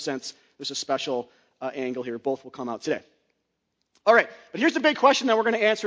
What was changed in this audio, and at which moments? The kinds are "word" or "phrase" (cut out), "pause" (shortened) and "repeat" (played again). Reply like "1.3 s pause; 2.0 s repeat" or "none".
none